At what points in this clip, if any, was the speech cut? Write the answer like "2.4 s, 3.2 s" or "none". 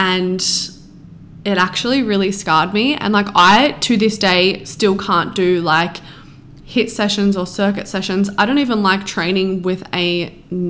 none